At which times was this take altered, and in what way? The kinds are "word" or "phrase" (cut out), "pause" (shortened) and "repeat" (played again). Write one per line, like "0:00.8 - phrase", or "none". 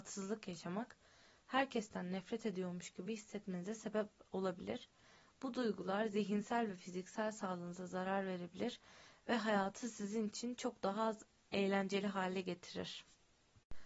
none